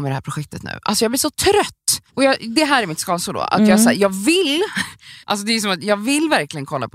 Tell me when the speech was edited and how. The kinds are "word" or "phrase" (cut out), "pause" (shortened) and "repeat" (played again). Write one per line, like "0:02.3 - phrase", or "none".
0:02.1 - pause
0:05.2 - pause